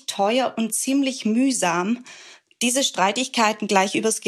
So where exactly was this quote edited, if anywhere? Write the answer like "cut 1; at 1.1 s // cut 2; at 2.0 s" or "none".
none